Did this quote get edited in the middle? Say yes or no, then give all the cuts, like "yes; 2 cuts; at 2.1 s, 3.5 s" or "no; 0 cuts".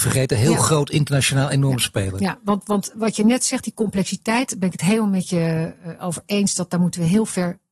no; 0 cuts